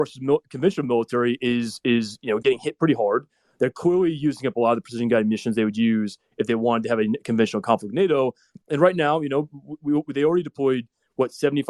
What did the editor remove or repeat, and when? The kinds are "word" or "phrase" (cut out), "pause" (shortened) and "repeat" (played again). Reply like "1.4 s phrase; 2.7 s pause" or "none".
none